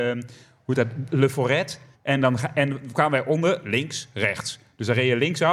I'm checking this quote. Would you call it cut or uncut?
cut